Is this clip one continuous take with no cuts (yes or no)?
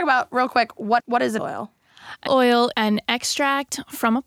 no